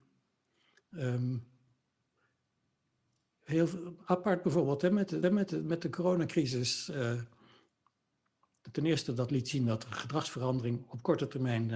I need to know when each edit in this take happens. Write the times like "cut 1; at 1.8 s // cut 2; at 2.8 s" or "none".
cut 1; at 5.2 s